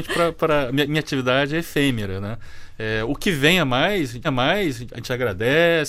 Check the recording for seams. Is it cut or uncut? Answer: cut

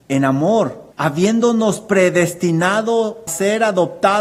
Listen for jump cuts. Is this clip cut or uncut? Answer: cut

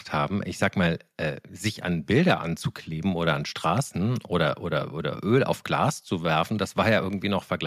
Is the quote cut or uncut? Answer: uncut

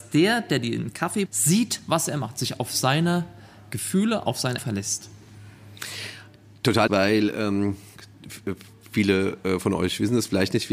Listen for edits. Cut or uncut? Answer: cut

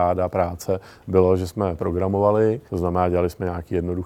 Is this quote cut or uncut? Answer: cut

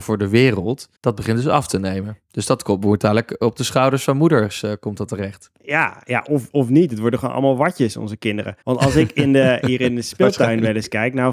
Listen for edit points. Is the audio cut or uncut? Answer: cut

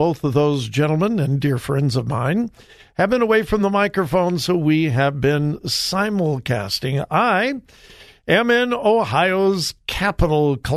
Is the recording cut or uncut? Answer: uncut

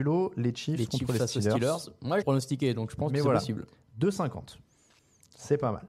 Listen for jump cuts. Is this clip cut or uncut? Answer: cut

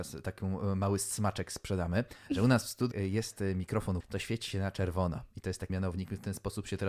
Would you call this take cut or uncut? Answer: cut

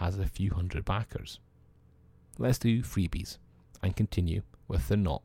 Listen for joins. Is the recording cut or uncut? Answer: uncut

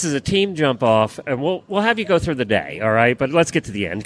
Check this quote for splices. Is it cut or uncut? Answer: uncut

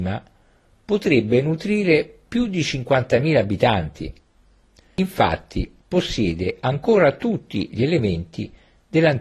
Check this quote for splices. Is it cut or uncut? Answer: cut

